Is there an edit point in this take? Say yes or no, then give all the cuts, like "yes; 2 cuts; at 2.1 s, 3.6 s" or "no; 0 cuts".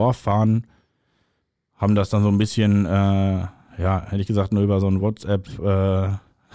no; 0 cuts